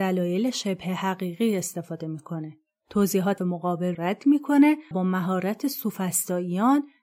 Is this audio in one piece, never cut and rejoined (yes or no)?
no